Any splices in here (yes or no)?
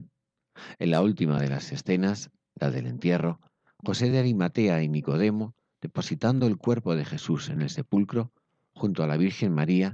no